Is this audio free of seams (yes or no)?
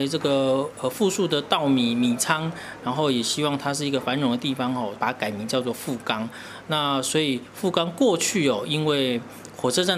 no